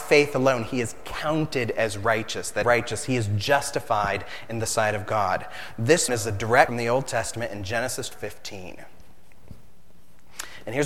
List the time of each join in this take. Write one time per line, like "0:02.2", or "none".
0:02.6
0:06.1
0:06.7
0:08.1